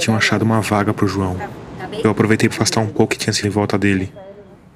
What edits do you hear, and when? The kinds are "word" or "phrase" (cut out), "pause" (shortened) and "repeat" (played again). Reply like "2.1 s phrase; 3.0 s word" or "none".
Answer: 2.5 s phrase; 3.1 s phrase; 3.4 s word